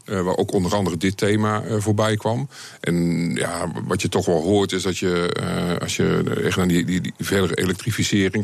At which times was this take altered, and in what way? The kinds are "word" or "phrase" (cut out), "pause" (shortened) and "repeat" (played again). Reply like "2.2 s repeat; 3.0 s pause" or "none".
none

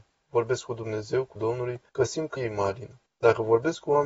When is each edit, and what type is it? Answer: 1.4 s word; 1.9 s pause; 2.4 s word; 3.1 s pause

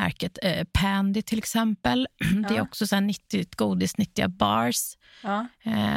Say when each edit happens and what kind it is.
none

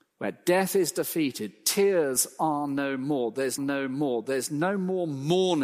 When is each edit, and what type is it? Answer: 3.6 s repeat

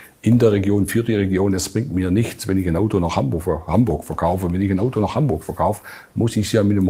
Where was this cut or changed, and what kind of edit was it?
none

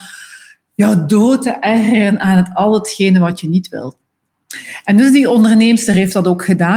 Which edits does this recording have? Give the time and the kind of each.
none

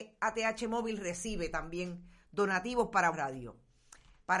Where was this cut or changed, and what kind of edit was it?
3.1 s word

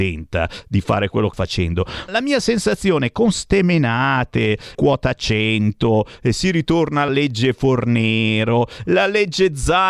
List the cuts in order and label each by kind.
1.3 s word; 2.1 s word; 4.7 s word; 7.1 s word

